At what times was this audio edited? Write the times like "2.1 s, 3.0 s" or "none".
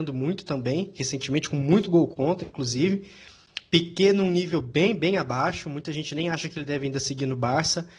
none